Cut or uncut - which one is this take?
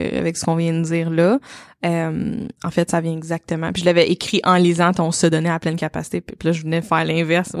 cut